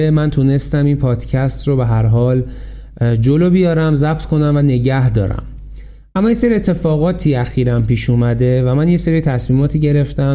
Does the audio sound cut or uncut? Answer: uncut